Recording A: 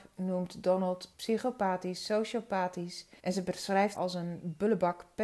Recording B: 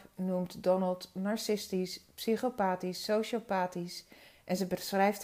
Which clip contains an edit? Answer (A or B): A